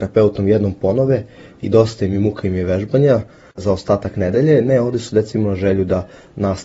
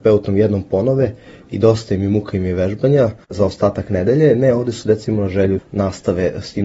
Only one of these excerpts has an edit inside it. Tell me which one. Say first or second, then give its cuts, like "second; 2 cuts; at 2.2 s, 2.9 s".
second; 2 cuts; at 3.2 s, 5.6 s